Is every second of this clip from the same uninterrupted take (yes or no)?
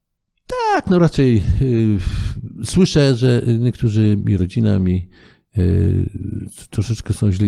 yes